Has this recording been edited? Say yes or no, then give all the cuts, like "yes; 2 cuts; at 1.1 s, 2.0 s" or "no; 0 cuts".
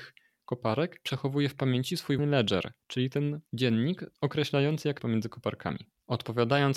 yes; 4 cuts; at 2.2 s, 2.8 s, 3.5 s, 5.0 s